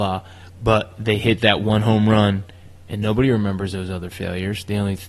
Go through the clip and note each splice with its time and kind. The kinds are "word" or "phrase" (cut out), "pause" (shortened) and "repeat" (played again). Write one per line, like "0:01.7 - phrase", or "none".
none